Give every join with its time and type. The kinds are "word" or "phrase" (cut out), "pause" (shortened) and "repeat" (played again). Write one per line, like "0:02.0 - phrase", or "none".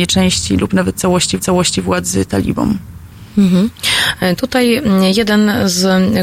0:01.4 - repeat